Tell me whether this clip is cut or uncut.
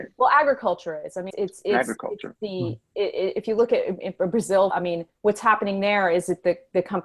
cut